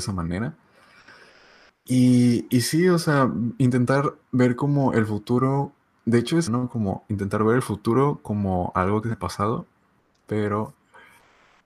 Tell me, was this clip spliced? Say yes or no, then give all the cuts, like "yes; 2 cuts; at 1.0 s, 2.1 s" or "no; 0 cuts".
yes; 3 cuts; at 4.2 s, 6.5 s, 9.0 s